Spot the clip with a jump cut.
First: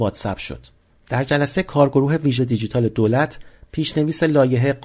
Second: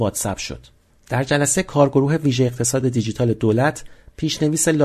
first; 1 cut; at 2.4 s

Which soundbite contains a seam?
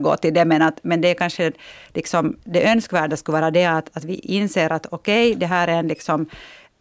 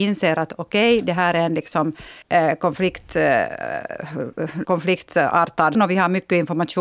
second; 3 cuts; at 2.2 s, 4.6 s, 5.7 s

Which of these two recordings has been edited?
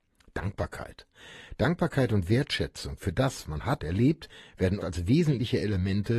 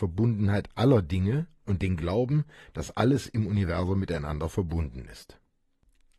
first; 3 cuts; at 3.4 s, 3.8 s, 4.8 s

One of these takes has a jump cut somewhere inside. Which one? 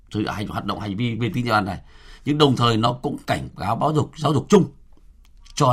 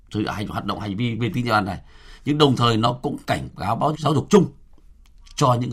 second; 1 cut; at 3.9 s

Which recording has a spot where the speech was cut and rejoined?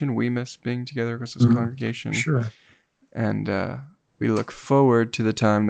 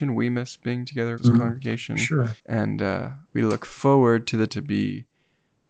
second; 4 cuts; at 1.2 s, 2.4 s, 3.3 s, 4.5 s

